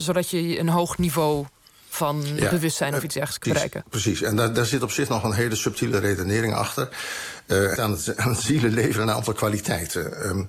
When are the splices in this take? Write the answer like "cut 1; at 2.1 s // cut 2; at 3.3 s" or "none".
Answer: cut 1; at 3.4 s // cut 2; at 7.8 s